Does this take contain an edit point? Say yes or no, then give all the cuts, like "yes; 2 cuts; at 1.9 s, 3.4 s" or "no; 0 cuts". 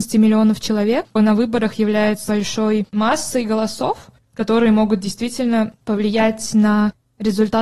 yes; 5 cuts; at 1.2 s, 2.3 s, 2.9 s, 4.2 s, 5.8 s